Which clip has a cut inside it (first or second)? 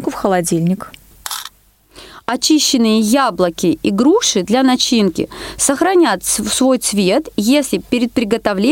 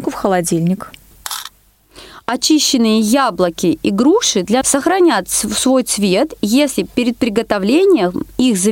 second